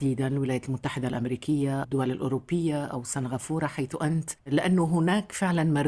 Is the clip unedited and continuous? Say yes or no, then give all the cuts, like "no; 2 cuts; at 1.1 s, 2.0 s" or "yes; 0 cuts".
no; 1 cut; at 1.8 s